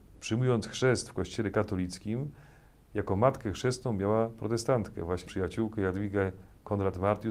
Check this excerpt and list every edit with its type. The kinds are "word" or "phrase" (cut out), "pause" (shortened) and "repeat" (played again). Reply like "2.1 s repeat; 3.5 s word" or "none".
5.3 s word